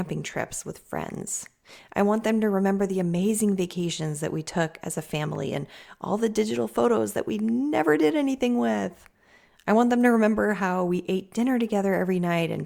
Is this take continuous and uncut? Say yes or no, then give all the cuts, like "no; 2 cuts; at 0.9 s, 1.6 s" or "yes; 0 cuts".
yes; 0 cuts